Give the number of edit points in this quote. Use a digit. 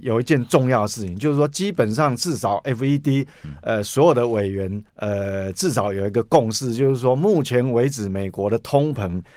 1